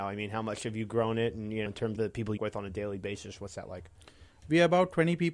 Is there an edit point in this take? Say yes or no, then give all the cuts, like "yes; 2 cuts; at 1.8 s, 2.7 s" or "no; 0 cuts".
yes; 3 cuts; at 1.7 s, 2.0 s, 2.4 s